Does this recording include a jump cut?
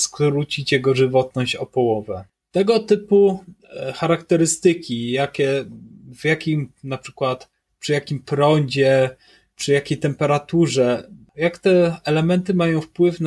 no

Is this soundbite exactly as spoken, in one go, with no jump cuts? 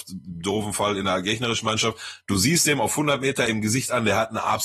yes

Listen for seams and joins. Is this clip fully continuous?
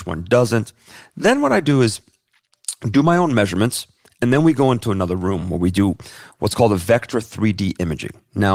yes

